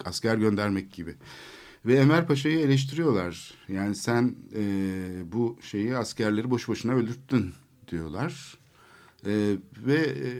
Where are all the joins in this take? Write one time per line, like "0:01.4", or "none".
none